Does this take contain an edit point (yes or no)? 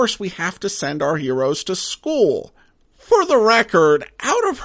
no